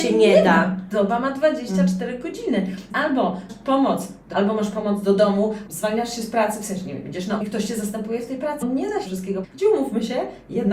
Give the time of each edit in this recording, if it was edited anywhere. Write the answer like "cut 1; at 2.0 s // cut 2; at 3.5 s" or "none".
cut 1; at 2.9 s // cut 2; at 3.5 s // cut 3; at 4.3 s // cut 4; at 5.7 s // cut 5; at 7.4 s // cut 6; at 8.6 s // cut 7; at 9.1 s // cut 8; at 9.4 s